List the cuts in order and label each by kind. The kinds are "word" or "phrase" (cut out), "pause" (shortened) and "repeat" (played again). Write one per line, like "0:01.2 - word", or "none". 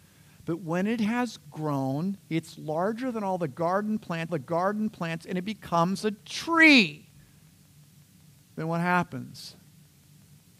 0:04.3 - repeat